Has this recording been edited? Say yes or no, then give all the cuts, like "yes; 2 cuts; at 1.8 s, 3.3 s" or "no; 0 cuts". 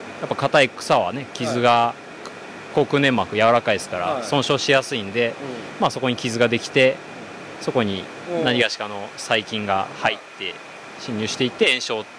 no; 0 cuts